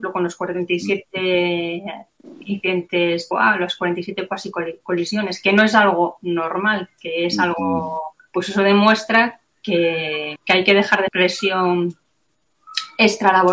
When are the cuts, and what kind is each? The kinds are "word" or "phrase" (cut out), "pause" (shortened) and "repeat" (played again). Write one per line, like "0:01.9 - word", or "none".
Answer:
0:03.3 - word
0:08.2 - pause
0:10.4 - word
0:11.1 - word